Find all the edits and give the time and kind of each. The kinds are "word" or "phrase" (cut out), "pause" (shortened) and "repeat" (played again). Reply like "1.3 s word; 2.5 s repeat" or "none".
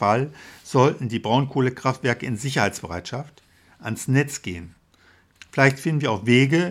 none